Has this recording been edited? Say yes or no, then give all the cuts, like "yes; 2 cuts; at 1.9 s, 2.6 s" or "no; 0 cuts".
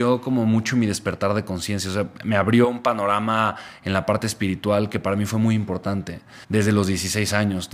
yes; 1 cut; at 6.4 s